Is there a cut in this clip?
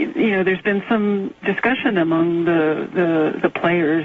no; 0 cuts

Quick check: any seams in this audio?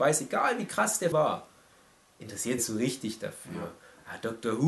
yes; 2 cuts; at 1.1 s, 2.6 s

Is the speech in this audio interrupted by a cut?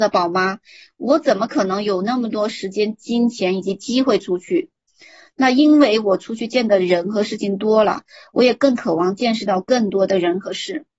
no; 0 cuts

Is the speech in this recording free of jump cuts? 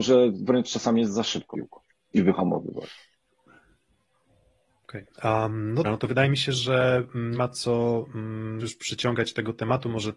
no; 5 cuts; at 1.5 s, 2.2 s, 5.8 s, 7.3 s, 8.6 s

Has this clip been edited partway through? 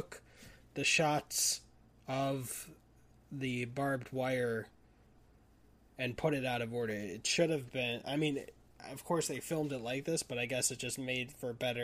no; 0 cuts

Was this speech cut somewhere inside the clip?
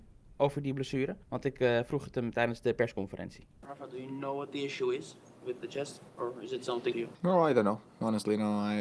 yes; 5 cuts; at 1.2 s, 3.5 s, 5.6 s, 6.1 s, 6.9 s

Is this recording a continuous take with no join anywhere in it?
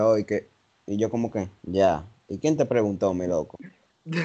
yes; 0 cuts

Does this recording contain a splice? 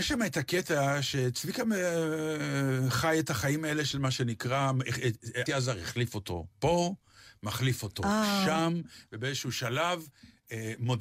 yes; 2 cuts; at 5.5 s, 6.5 s

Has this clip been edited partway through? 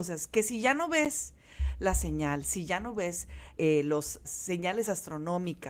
yes; 2 cuts; at 3.6 s, 4.2 s

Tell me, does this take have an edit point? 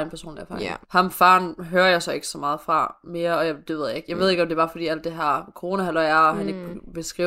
no; 0 cuts

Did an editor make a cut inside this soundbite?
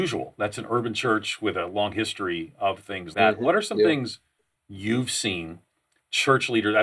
yes; 1 cut; at 3.1 s

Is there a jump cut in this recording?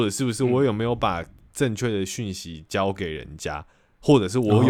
no; 0 cuts

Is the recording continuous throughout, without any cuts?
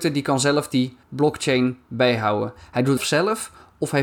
no; 2 cuts; at 1.0 s, 3.0 s

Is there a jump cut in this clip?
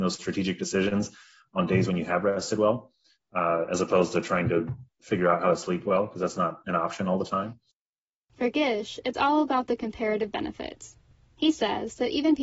no; 0 cuts

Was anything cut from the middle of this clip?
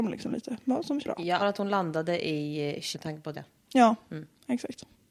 yes; 4 cuts; at 1.0 s, 1.4 s, 2.9 s, 3.3 s

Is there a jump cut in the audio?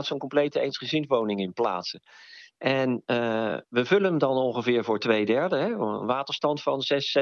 no; 0 cuts

